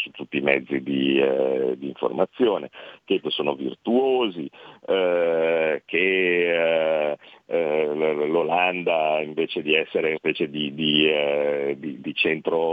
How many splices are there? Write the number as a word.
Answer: two